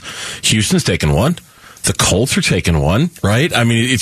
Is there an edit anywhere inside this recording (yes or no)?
no